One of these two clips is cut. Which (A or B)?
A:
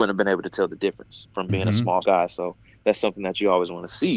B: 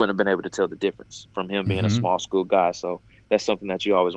A